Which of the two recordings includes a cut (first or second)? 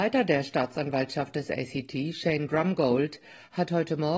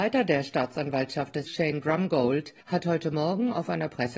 second